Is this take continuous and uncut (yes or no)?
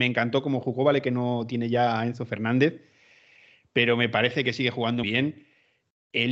no